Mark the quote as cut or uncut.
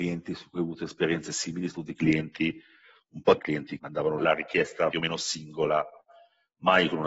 cut